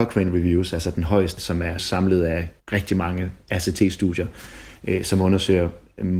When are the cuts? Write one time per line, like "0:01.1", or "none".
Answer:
0:01.4
0:01.8
0:02.6